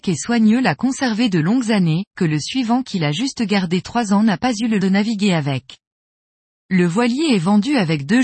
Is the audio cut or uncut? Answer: cut